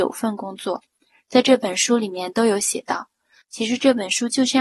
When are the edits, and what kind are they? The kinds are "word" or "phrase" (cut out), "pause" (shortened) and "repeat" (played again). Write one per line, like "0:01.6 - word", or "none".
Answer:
none